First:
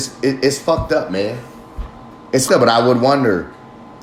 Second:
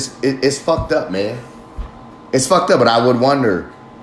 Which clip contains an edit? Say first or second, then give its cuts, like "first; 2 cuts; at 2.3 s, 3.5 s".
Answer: first; 1 cut; at 2.5 s